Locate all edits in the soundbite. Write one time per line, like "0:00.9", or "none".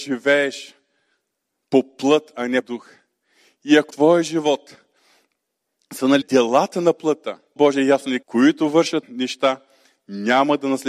0:02.6
0:03.9
0:06.2
0:07.6
0:08.2
0:09.0